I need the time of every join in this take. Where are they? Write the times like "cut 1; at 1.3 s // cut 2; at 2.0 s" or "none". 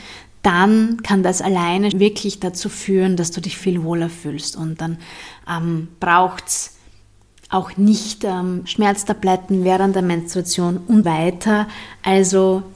cut 1; at 1.9 s // cut 2; at 3.6 s // cut 3; at 8.6 s // cut 4; at 11.0 s